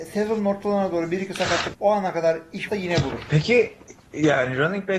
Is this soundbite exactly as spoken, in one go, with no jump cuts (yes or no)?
no